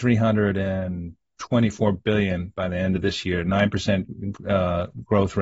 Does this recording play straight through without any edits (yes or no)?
yes